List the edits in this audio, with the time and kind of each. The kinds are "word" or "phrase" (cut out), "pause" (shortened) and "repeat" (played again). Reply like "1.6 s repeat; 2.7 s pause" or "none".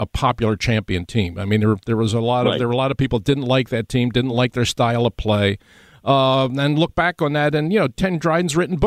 none